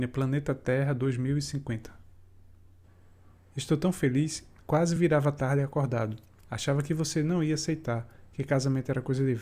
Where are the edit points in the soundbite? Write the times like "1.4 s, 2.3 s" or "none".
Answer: none